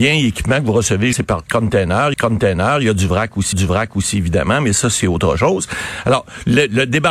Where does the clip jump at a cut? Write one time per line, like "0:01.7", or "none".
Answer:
0:01.1
0:02.1
0:03.5